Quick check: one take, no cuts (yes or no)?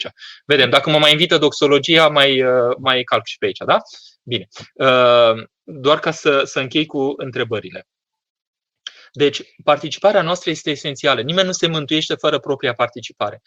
yes